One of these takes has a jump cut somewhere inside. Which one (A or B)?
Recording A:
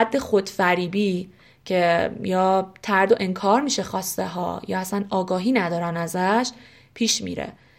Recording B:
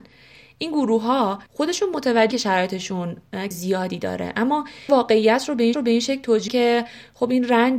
B